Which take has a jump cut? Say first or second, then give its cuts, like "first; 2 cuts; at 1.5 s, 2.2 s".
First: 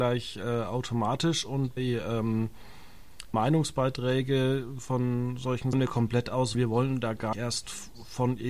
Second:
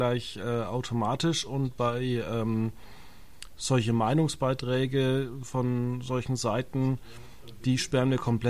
first; 5 cuts; at 1.8 s, 3.3 s, 5.7 s, 6.5 s, 7.3 s